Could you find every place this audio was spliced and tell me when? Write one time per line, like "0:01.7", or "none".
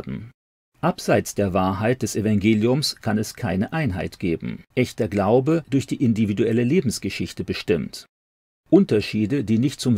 0:04.7
0:05.6